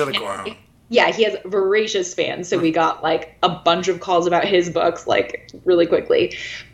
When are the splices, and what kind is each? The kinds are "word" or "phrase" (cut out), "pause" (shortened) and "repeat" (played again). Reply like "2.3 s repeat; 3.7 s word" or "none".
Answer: none